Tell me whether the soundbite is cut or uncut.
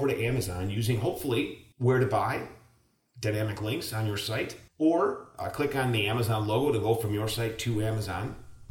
cut